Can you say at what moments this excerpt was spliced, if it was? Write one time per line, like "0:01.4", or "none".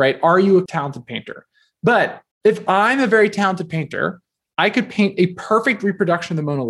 0:02.3